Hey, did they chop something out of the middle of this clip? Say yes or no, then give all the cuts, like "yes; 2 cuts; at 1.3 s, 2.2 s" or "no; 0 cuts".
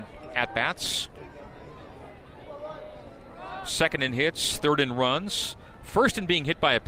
no; 0 cuts